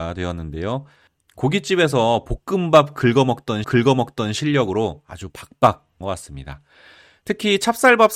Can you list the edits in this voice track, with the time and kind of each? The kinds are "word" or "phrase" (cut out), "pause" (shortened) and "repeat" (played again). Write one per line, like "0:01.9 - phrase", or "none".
0:03.6 - repeat
0:06.0 - phrase